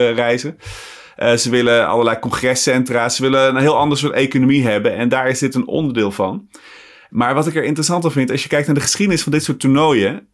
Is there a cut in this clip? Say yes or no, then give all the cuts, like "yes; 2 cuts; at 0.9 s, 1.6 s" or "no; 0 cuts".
no; 0 cuts